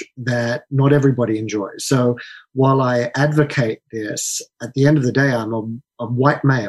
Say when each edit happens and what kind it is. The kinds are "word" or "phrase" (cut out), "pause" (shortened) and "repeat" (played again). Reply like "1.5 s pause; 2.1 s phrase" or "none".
4.5 s word